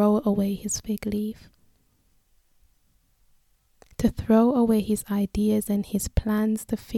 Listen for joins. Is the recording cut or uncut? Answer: uncut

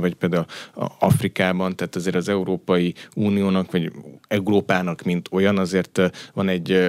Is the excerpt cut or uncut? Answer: uncut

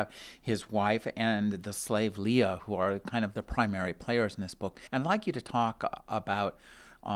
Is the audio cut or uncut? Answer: cut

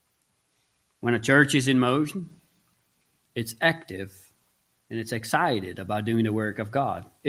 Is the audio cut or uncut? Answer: uncut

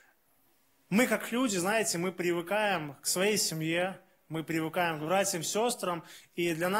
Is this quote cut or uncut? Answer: uncut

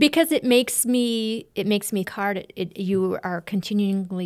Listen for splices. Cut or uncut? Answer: cut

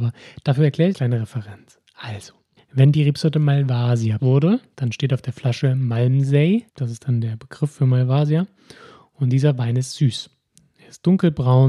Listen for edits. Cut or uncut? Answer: cut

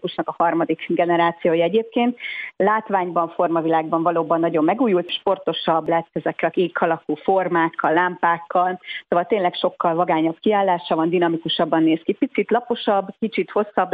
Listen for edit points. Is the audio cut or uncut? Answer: uncut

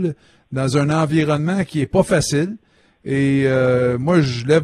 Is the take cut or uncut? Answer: uncut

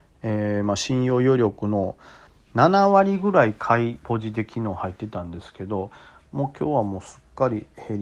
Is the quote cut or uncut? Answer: uncut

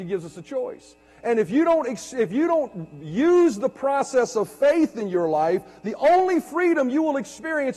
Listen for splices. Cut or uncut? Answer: uncut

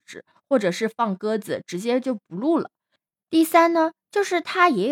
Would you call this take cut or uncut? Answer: uncut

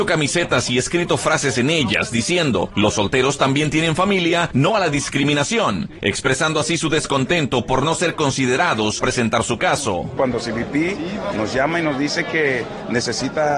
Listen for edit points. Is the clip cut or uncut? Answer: cut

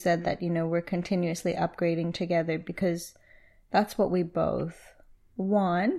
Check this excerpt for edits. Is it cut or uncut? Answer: uncut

